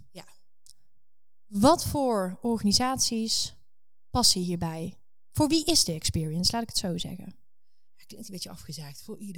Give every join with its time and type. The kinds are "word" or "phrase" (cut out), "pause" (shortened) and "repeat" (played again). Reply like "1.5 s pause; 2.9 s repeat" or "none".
none

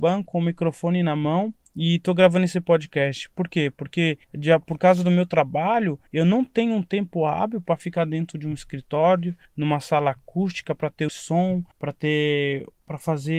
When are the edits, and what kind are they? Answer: 4.2 s pause; 6.1 s pause; 9.5 s pause; 11.1 s word; 11.7 s pause

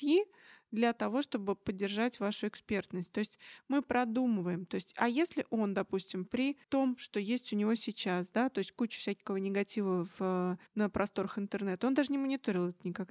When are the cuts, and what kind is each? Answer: 6.6 s pause; 10.7 s pause

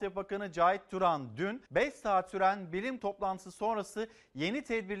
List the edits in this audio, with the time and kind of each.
1.7 s pause; 3.0 s word

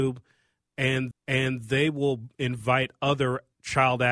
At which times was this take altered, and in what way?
1.1 s repeat

